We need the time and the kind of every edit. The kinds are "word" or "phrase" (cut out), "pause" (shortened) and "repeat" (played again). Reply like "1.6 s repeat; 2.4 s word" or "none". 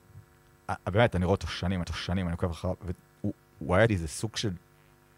1.8 s repeat; 3.9 s word